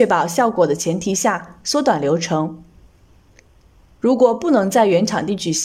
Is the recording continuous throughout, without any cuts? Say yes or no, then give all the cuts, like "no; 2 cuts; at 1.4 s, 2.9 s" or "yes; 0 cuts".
yes; 0 cuts